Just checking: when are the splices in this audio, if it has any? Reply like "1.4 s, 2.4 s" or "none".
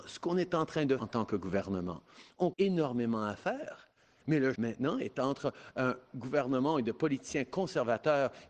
1.0 s, 2.5 s, 4.5 s